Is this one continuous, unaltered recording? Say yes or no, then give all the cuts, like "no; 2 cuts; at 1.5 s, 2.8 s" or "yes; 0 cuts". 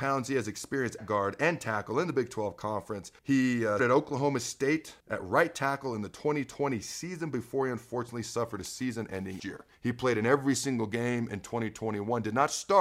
no; 6 cuts; at 1.0 s, 3.2 s, 3.8 s, 5.0 s, 9.4 s, 9.7 s